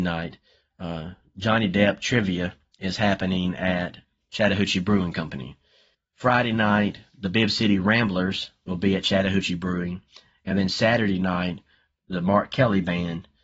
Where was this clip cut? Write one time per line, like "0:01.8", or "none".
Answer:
none